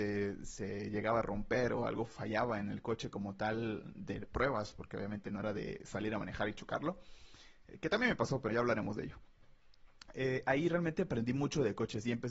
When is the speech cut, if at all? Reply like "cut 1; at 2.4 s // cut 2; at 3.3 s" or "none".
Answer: cut 1; at 8.5 s